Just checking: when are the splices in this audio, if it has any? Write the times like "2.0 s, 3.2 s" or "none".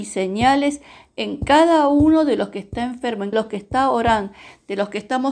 3.3 s